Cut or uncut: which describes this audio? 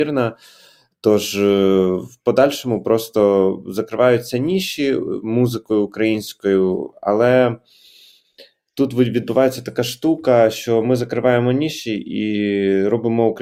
uncut